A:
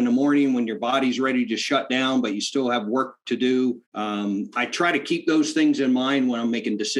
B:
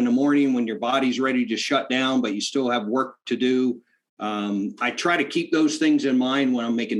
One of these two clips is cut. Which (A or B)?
A